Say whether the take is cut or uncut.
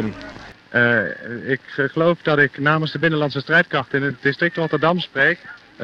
uncut